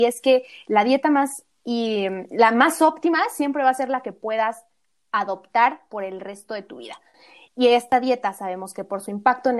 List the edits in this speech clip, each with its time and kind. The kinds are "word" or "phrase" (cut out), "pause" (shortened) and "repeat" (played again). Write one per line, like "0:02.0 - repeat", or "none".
none